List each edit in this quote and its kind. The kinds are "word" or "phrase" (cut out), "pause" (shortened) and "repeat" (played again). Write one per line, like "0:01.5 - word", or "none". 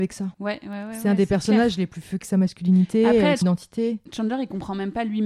0:02.2 - word
0:03.4 - word